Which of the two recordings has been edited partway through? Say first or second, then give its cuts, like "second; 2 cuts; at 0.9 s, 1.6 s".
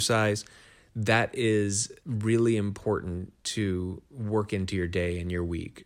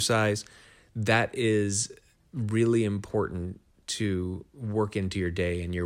first; 2 cuts; at 2.0 s, 3.4 s